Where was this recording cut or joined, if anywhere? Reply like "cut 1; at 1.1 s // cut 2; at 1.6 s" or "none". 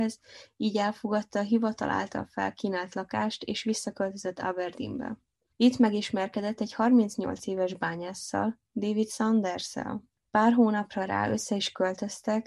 none